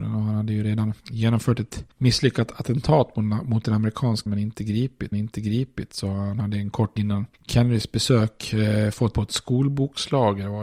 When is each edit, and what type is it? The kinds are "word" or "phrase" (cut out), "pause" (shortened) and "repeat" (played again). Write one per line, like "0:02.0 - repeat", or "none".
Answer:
0:01.0 - pause
0:04.3 - word
0:05.1 - repeat
0:07.0 - word
0:07.3 - pause
0:09.1 - word